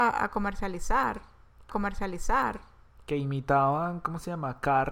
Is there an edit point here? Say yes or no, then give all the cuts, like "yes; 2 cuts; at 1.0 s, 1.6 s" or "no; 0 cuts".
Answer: yes; 1 cut; at 1.7 s